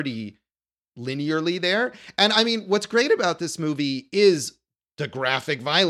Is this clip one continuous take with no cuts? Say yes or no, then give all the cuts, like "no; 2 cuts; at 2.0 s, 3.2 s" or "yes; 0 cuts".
yes; 0 cuts